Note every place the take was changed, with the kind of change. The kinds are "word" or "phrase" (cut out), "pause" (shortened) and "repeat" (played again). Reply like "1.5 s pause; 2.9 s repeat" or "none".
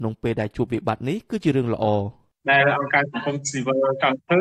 none